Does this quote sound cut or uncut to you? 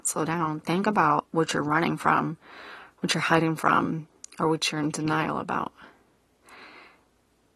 uncut